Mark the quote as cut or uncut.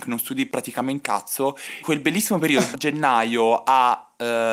cut